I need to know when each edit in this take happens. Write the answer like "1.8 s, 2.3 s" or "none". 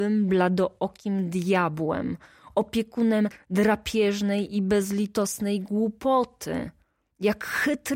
none